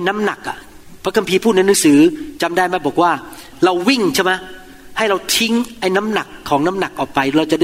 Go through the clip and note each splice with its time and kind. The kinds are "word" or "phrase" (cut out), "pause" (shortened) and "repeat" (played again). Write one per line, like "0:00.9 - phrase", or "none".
none